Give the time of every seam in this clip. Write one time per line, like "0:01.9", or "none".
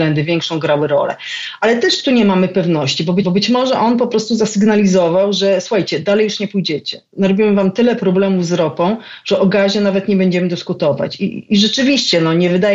0:03.2